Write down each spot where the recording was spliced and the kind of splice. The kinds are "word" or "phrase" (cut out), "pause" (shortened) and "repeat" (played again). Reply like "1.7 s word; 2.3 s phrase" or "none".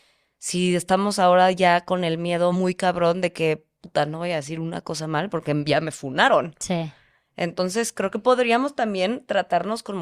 none